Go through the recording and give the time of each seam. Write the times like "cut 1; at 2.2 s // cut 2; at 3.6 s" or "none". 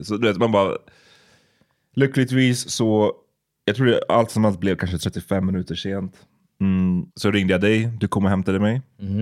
cut 1; at 7.1 s

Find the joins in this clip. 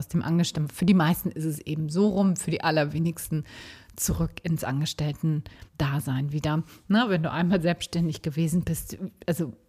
cut 1; at 5.7 s

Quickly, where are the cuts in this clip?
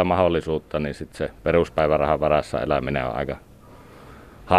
none

